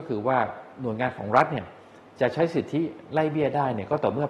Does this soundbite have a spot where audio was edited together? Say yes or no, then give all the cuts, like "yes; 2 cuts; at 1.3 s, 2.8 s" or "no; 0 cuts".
no; 0 cuts